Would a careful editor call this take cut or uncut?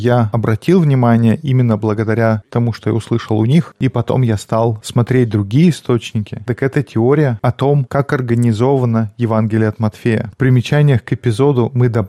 uncut